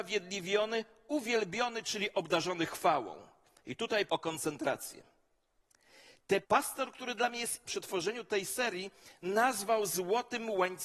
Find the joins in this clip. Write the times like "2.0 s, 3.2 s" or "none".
4.1 s, 6.4 s, 7.7 s

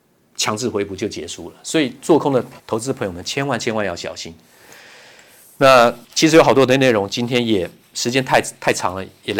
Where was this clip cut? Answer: 2.6 s, 6.0 s

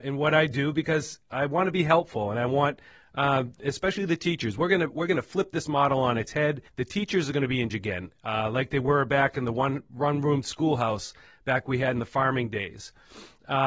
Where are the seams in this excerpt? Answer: 6.7 s, 7.7 s

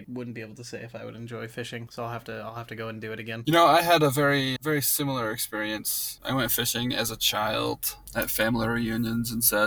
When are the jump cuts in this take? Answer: 4.6 s

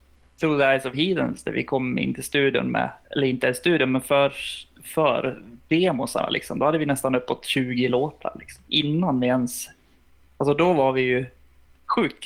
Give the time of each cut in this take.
3.0 s

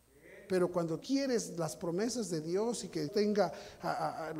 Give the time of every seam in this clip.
1.0 s, 3.1 s

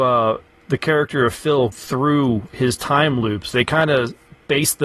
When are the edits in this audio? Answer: 1.7 s

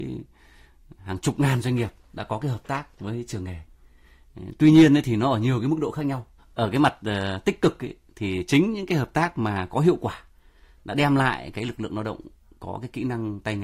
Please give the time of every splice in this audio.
2.9 s, 6.4 s

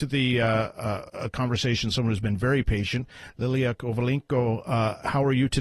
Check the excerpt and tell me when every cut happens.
none

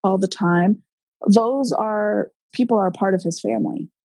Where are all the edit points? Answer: 2.5 s

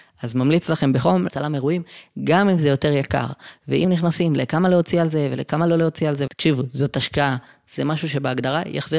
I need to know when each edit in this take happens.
1.3 s, 3.8 s, 6.3 s

